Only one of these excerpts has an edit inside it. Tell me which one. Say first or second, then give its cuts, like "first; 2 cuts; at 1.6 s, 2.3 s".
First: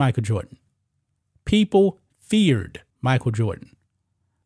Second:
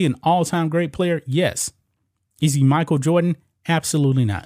first; 1 cut; at 2.9 s